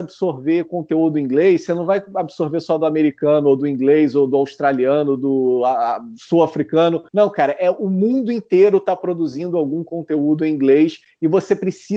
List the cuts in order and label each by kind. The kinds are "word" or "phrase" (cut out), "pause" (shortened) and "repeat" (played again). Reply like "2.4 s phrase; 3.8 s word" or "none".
7.1 s pause